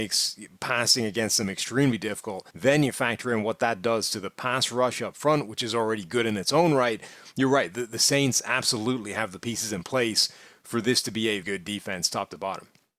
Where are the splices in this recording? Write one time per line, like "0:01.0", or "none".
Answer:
0:02.5
0:11.4